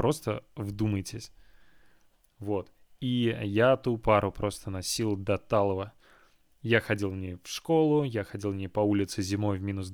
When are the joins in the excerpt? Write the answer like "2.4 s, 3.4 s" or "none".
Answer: none